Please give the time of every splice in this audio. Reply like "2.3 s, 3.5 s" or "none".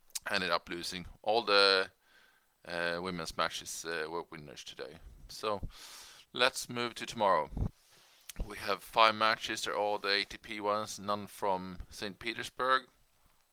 none